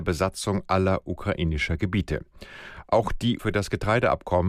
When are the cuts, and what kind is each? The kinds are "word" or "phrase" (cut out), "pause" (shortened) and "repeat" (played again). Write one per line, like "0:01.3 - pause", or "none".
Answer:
0:03.4 - word